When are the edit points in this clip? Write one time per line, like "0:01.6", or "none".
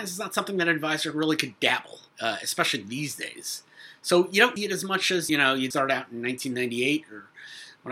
0:02.1
0:04.6
0:05.3
0:05.7

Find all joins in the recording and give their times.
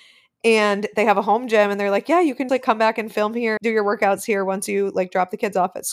0:02.5
0:03.6

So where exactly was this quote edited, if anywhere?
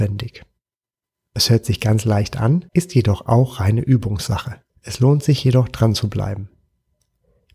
0:02.7
0:04.7

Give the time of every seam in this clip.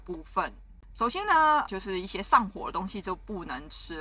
0:01.7

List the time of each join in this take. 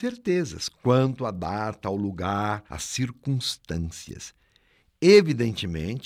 0:02.7

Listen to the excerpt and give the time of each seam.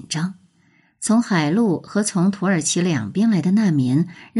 none

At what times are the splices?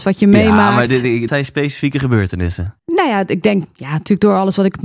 0:01.3
0:02.8
0:03.6

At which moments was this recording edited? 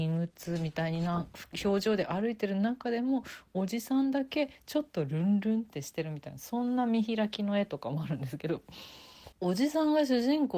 0:09.3

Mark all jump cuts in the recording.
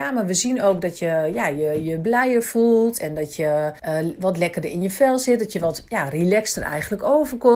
0:03.8

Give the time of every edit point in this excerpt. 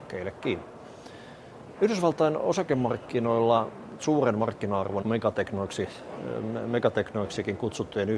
0:04.0
0:05.0

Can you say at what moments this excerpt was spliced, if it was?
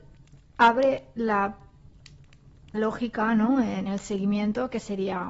0:02.7
0:03.9

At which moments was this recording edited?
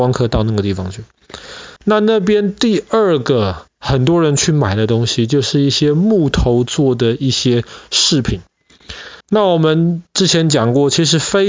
0:01.8
0:09.2

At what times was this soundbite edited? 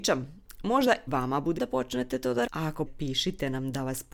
0:01.1
0:01.6
0:02.5
0:02.9

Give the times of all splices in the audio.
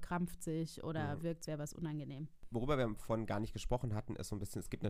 0:01.5

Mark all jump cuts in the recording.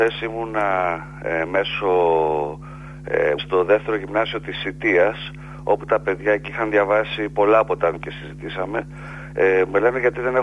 0:03.4
0:07.9

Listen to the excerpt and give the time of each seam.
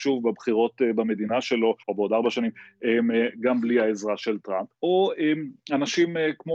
0:01.8
0:04.7

